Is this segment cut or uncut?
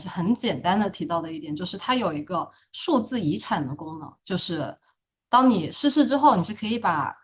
cut